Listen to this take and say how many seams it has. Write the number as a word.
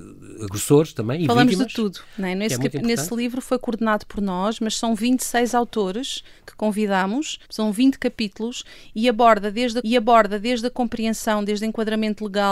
two